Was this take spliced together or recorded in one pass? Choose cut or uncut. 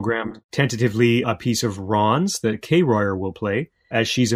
cut